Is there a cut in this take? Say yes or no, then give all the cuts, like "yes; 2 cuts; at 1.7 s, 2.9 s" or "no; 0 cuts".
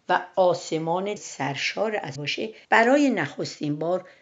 yes; 3 cuts; at 1.2 s, 2.1 s, 2.6 s